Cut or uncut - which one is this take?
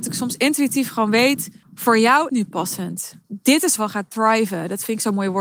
cut